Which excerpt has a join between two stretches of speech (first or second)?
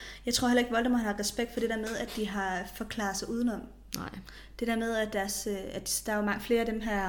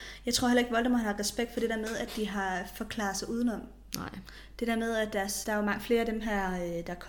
second